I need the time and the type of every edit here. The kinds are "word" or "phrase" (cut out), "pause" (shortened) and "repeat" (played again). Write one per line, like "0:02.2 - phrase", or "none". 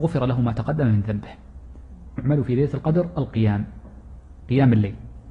0:02.2 - phrase

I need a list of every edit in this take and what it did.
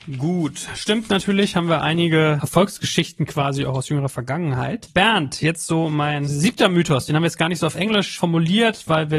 none

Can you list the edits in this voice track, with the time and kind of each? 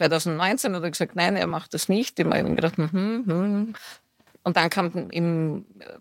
none

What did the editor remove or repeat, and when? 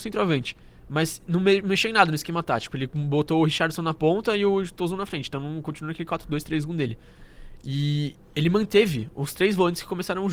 none

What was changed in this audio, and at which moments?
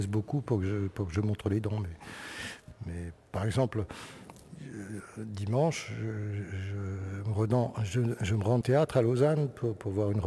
0:08.6 - phrase

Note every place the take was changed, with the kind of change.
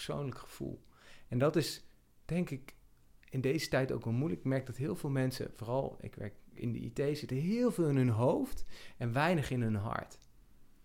none

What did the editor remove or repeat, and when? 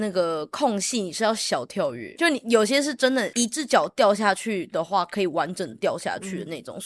0:02.1 - word

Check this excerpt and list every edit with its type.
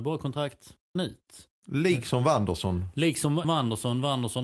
0:01.0 - word
0:03.4 - word

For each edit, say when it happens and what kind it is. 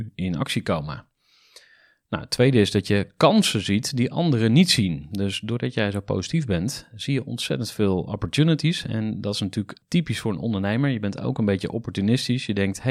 none

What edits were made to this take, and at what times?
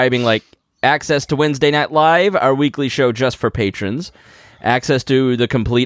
none

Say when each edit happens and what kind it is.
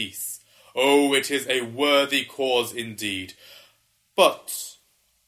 none

